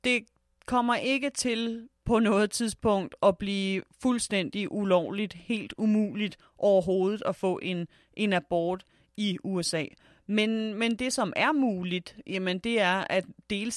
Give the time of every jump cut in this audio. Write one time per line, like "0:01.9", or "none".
none